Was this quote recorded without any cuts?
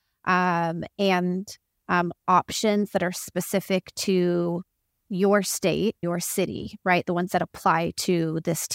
no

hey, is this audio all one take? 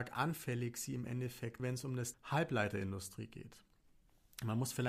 no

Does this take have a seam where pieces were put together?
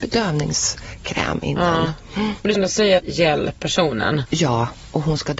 yes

